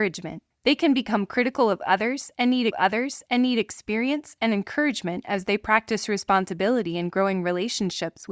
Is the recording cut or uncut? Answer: cut